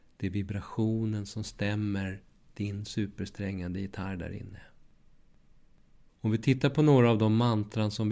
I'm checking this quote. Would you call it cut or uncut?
uncut